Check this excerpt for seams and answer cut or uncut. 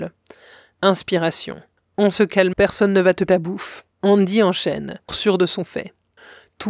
cut